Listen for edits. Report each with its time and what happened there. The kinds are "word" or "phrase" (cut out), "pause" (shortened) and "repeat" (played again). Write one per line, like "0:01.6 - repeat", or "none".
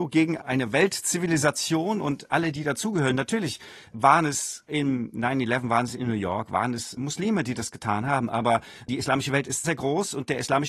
0:02.5 - word
0:09.6 - word